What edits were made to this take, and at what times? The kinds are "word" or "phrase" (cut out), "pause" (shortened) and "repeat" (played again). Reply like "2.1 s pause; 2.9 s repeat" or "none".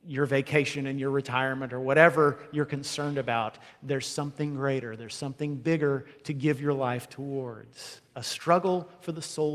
none